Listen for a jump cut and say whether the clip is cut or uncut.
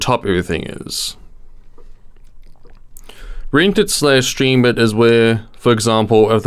uncut